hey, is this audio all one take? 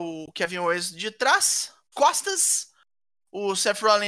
no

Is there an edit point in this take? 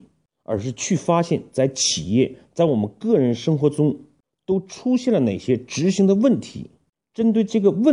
no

